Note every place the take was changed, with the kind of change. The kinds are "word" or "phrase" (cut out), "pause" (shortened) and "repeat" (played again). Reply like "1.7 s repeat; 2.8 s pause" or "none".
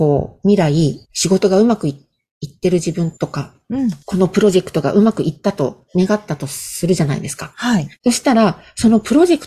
1.0 s pause; 3.2 s pause; 4.0 s pause; 5.9 s pause; 8.0 s pause